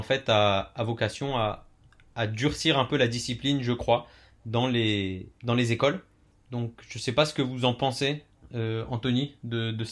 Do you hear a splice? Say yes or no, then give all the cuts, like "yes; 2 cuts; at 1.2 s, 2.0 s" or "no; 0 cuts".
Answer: no; 0 cuts